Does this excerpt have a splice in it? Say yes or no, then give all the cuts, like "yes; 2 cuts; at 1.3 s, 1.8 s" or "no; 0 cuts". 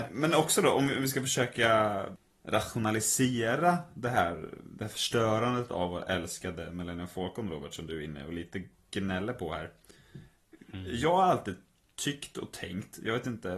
no; 0 cuts